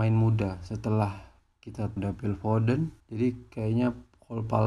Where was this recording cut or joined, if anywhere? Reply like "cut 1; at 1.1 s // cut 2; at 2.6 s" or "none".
cut 1; at 2.0 s // cut 2; at 3.0 s